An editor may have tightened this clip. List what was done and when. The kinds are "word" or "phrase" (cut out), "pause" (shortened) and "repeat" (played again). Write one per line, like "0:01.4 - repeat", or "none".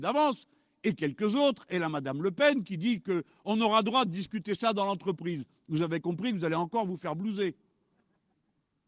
none